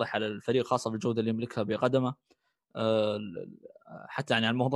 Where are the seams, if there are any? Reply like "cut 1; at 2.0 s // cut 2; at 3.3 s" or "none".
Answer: none